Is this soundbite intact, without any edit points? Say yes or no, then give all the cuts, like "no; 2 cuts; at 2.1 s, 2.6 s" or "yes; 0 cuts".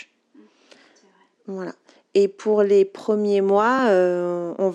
yes; 0 cuts